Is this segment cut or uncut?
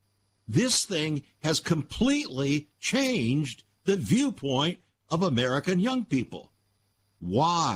uncut